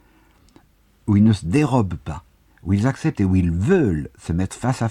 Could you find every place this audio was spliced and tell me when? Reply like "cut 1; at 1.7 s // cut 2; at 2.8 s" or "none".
none